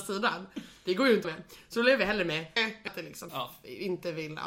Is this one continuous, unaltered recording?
no; 4 cuts; at 1.2 s, 2.6 s, 2.9 s, 3.3 s

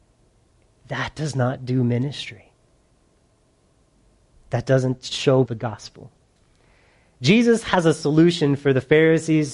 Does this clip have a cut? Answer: yes; 1 cut; at 5.5 s

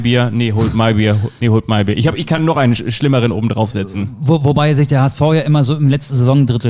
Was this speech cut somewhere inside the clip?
no; 0 cuts

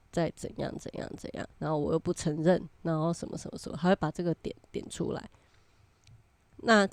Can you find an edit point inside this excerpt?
yes; 1 cut; at 1.5 s

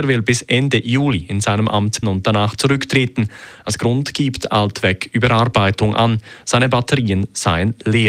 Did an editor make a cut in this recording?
yes; 1 cut; at 2.0 s

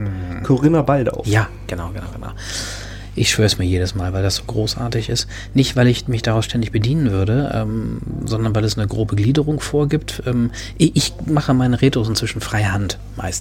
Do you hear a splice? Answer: no; 0 cuts

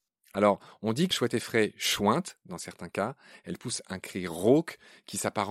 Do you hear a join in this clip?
yes; 1 cut; at 1.1 s

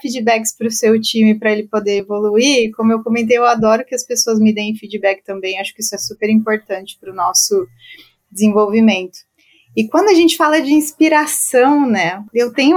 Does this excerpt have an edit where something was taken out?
no; 0 cuts

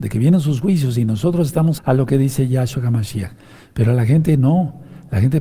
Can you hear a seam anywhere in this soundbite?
yes; 1 cut; at 1.8 s

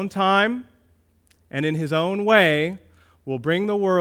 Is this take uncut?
yes; 0 cuts

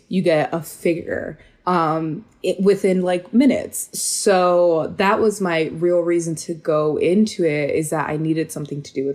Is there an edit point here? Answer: no; 0 cuts

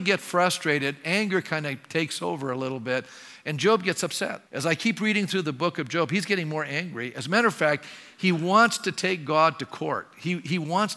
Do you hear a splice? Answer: yes; 1 cut; at 4.5 s

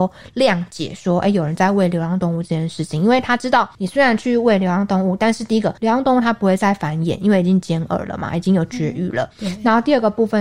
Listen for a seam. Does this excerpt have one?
yes; 2 cuts; at 3.7 s, 5.8 s

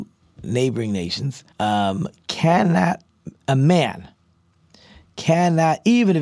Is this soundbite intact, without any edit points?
no; 1 cut; at 1.5 s

